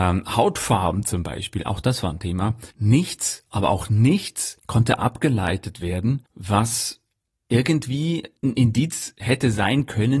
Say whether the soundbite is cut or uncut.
cut